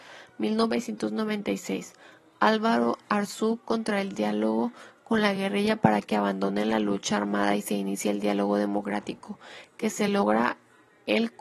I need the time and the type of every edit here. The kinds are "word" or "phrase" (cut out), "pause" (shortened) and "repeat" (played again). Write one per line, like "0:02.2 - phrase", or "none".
none